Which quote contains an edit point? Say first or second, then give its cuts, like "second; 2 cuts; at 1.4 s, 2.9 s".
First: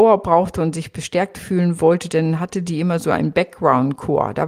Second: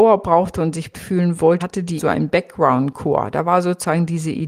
second; 3 cuts; at 0.9 s, 1.6 s, 2.0 s